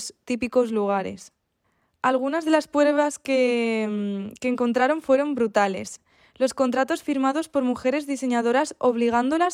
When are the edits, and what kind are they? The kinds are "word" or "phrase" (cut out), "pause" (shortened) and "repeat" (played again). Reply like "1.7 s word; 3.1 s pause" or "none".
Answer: none